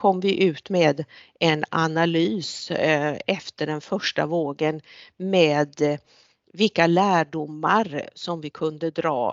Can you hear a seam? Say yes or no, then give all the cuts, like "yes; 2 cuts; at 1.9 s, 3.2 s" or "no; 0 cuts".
no; 0 cuts